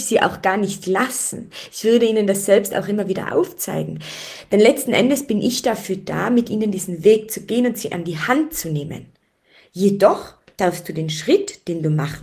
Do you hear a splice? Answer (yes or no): no